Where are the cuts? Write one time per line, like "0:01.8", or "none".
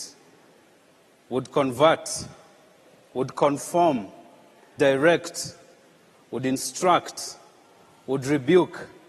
0:04.8

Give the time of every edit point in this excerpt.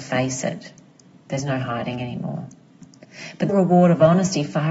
0:03.5

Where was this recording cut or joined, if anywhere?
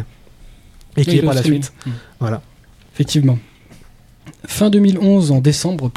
0:01.2

